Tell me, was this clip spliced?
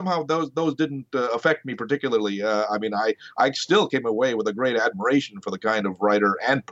no; 0 cuts

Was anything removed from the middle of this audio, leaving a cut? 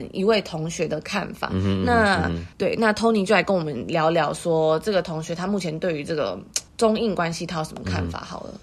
yes; 2 cuts; at 2.5 s, 6.7 s

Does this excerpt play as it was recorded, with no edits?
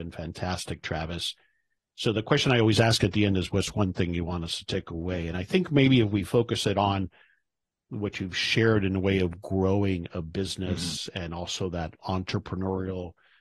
yes; 0 cuts

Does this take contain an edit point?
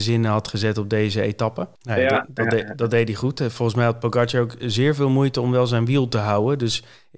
yes; 1 cut; at 1.8 s

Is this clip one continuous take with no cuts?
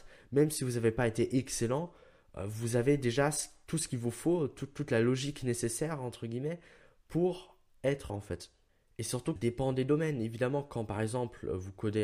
no; 2 cuts; at 8.1 s, 9.4 s

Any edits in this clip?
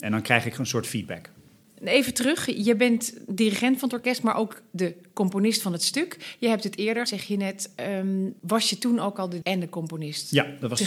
yes; 2 cuts; at 7.1 s, 9.4 s

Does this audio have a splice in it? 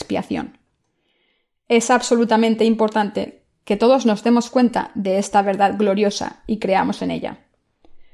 no; 0 cuts

